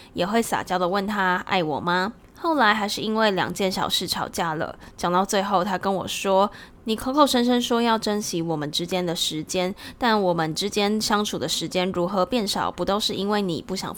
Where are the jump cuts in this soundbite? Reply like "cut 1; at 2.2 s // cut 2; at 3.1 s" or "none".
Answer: cut 1; at 2.2 s // cut 2; at 6.7 s